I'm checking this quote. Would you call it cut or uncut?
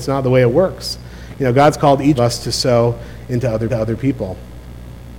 cut